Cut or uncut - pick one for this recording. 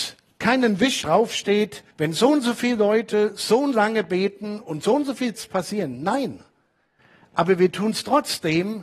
cut